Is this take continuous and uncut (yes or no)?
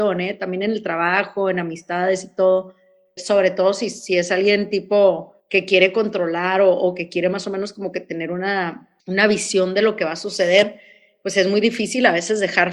no